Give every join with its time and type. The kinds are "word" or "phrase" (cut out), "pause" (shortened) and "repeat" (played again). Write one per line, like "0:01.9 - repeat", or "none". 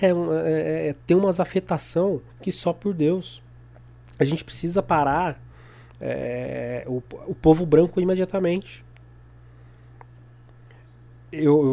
0:02.3 - pause

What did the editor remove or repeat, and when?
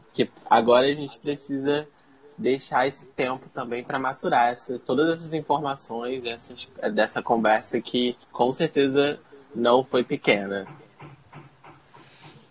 0:08.2 - pause
0:09.9 - word

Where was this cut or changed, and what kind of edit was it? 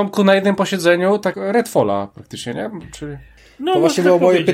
0:01.3 - word

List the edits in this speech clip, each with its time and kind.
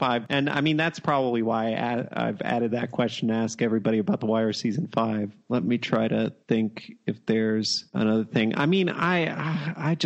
0:06.4 - pause

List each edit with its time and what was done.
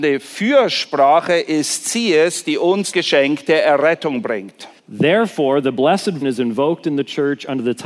0:02.9 - word
0:04.8 - pause
0:06.2 - word

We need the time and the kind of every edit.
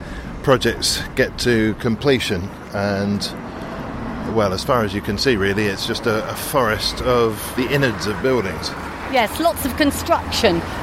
none

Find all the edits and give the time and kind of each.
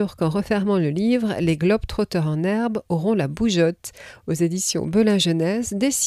none

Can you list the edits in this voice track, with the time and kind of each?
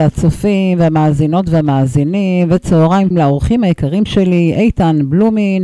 0:03.1 - word

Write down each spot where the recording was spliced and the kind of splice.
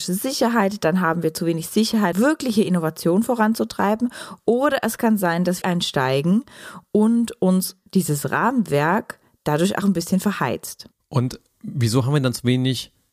0:02.1 - word
0:05.6 - phrase
0:07.9 - pause
0:09.8 - word
0:10.9 - pause

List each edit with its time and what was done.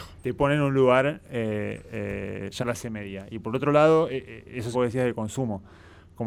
0:02.6 - word
0:04.7 - phrase

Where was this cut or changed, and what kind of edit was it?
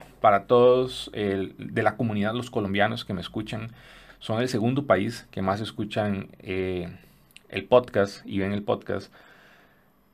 none

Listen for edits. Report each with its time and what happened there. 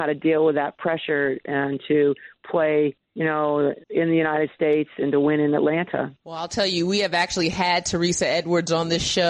0:03.0 - pause
0:03.8 - pause
0:06.2 - pause

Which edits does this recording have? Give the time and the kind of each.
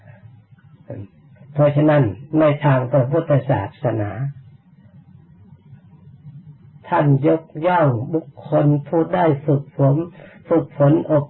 0:06.6 - pause

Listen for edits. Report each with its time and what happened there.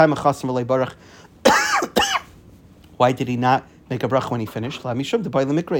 none

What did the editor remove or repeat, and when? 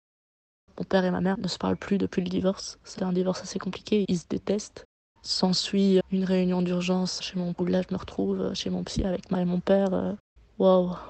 0:01.3 - word
0:03.0 - word
0:04.0 - word
0:06.0 - word
0:07.2 - word
0:07.5 - word
0:09.3 - word

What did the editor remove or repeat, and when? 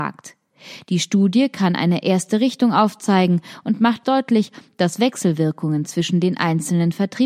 0:04.0 - word

